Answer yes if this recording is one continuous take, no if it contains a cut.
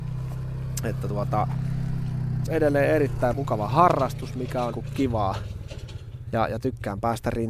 no